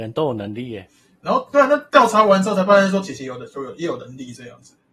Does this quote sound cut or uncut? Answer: uncut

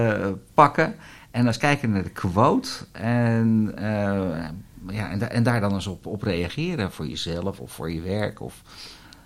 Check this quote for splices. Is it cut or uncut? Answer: uncut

